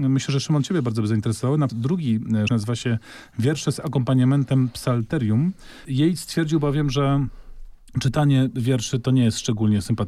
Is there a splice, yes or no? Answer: yes